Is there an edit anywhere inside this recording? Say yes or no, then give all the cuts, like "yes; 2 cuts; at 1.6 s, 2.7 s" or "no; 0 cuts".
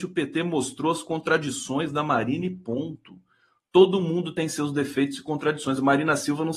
no; 0 cuts